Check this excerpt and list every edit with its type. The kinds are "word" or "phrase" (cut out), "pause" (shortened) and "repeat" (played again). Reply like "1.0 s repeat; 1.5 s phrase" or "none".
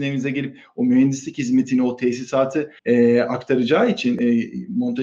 2.8 s pause